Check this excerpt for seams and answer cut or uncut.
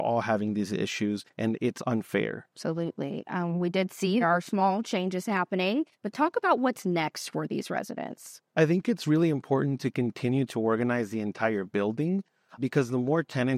cut